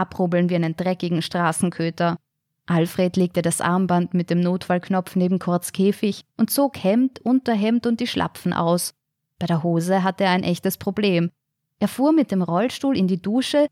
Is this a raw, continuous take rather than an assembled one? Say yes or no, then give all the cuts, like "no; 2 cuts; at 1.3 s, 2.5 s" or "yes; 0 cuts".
yes; 0 cuts